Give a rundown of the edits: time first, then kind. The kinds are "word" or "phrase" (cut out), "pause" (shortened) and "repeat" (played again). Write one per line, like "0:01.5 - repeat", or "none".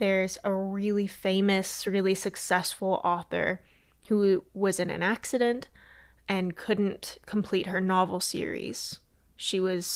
none